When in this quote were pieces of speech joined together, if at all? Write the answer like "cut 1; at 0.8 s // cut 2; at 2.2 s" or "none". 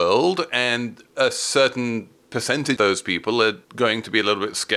cut 1; at 2.8 s // cut 2; at 3.6 s